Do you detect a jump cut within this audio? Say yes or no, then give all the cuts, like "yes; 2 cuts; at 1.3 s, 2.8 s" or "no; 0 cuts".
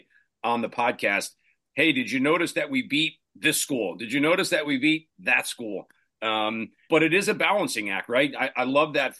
yes; 2 cuts; at 3.3 s, 6.9 s